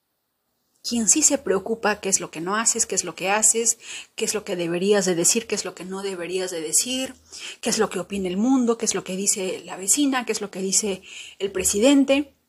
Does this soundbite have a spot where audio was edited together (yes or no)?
no